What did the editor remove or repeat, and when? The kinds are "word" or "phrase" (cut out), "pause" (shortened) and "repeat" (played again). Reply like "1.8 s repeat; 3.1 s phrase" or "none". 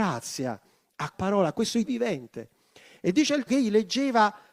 1.1 s word; 1.8 s word; 3.5 s word